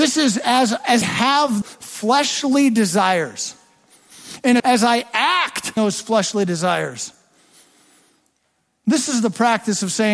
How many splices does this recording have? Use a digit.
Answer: 4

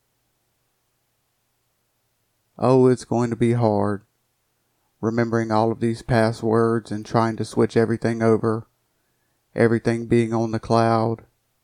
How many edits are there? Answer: 0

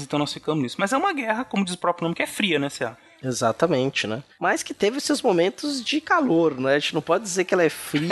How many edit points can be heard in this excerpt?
0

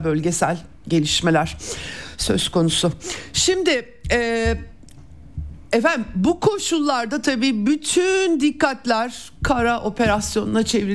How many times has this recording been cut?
0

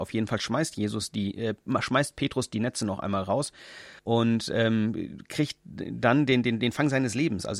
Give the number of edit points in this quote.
1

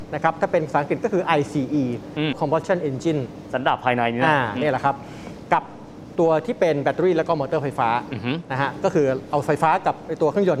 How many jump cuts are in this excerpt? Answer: 1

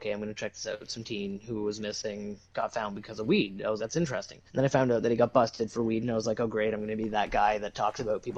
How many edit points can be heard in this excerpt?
2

